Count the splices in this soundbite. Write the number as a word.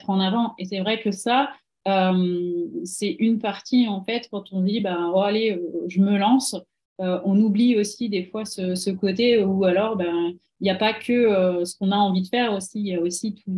zero